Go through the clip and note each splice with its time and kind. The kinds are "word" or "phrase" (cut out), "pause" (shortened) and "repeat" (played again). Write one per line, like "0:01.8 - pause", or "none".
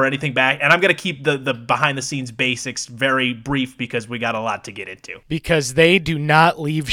none